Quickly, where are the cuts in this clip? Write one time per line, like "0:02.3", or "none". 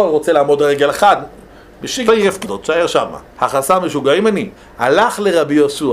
0:02.1
0:02.4
0:03.3
0:04.6